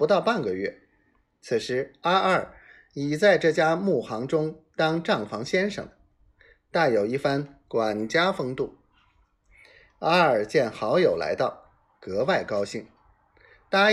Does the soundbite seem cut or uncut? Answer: uncut